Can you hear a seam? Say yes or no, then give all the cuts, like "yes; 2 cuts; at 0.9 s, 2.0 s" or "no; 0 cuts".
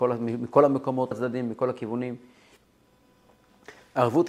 yes; 1 cut; at 1.1 s